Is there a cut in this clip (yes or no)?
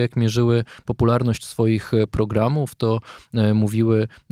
no